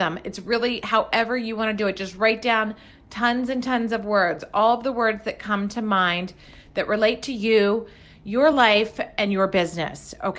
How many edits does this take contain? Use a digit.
0